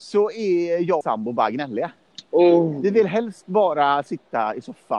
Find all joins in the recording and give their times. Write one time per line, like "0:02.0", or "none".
0:01.0

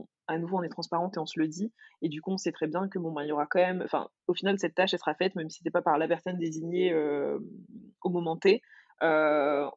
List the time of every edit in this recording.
none

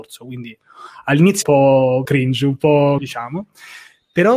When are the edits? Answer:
0:01.4
0:02.0
0:03.0

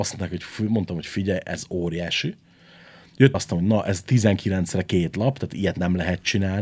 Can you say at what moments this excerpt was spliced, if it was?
0:03.3

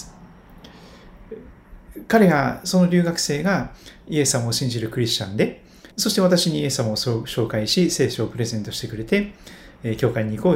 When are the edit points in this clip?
0:05.9

